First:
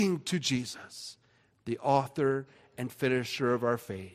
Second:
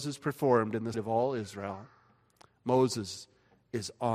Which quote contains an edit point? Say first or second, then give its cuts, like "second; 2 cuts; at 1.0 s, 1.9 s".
second; 1 cut; at 0.9 s